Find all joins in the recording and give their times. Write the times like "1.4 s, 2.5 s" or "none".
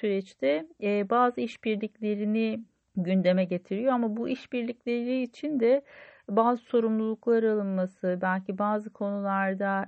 2.8 s